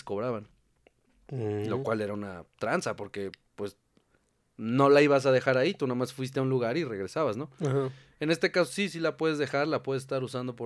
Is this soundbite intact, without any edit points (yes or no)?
yes